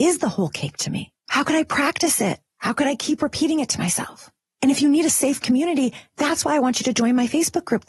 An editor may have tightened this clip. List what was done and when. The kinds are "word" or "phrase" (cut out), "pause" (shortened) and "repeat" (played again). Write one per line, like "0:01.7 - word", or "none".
0:01.2 - pause
0:04.4 - pause